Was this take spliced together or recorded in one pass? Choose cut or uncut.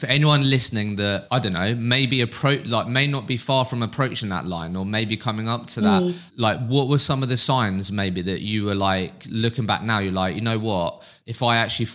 uncut